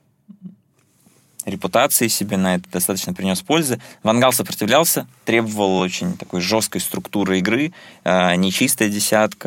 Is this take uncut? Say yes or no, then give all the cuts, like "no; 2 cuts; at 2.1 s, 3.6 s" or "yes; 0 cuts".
yes; 0 cuts